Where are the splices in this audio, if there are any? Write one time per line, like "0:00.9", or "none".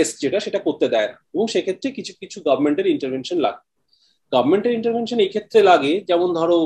none